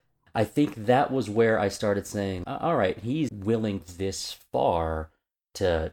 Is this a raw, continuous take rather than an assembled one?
no; 3 cuts; at 2.4 s, 3.3 s, 3.8 s

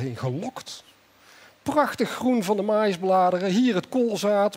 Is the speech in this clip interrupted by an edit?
no; 0 cuts

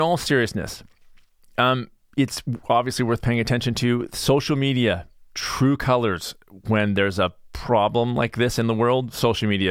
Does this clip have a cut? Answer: no; 0 cuts

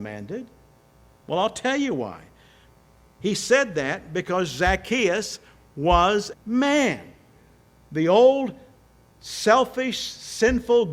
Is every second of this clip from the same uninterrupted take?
no; 1 cut; at 6.3 s

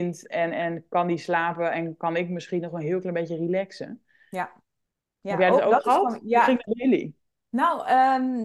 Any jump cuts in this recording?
no; 0 cuts

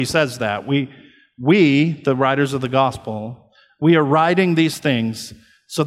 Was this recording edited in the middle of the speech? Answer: no; 0 cuts

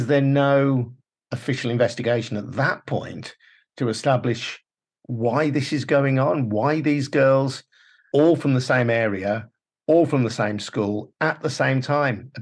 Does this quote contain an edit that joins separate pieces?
no; 0 cuts

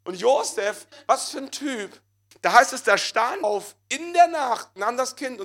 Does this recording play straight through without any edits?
no; 1 cut; at 3.4 s

